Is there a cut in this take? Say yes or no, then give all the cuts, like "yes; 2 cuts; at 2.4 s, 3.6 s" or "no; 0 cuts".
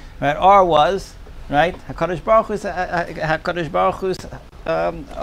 no; 0 cuts